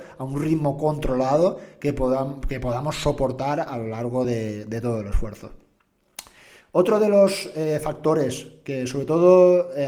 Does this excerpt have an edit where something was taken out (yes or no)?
no